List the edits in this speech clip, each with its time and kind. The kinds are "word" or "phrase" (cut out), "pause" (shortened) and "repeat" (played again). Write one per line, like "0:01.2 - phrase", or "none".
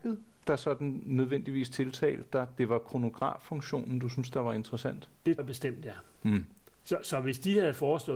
0:05.4 - word